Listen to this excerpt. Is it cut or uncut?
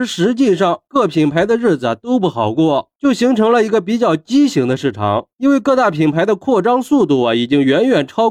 uncut